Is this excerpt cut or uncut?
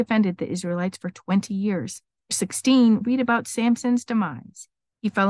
cut